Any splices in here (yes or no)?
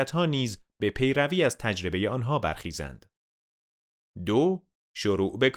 no